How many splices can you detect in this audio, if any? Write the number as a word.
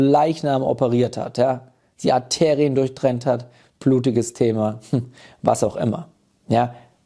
zero